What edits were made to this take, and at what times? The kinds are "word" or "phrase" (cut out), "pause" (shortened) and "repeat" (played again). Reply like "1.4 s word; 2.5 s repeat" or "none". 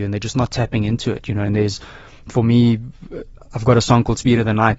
none